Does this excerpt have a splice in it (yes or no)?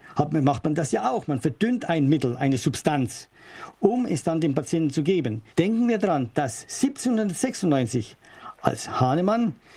yes